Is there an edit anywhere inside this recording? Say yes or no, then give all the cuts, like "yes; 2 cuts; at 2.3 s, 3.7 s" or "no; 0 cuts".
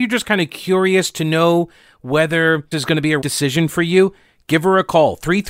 yes; 2 cuts; at 2.7 s, 3.2 s